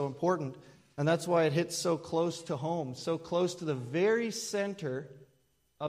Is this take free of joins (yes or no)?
yes